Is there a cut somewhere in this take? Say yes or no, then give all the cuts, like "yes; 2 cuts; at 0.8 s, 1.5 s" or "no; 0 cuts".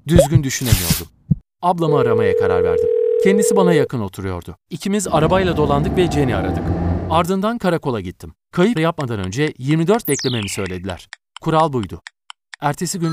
yes; 3 cuts; at 4.6 s, 8.8 s, 10.0 s